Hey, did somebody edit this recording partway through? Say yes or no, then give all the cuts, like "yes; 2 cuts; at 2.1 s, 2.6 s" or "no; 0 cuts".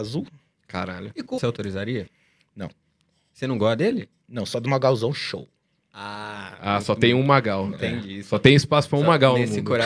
yes; 1 cut; at 1.4 s